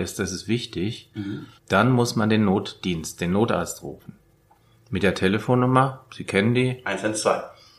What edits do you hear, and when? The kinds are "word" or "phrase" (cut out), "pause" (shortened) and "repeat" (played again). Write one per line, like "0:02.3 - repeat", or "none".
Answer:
0:01.6 - pause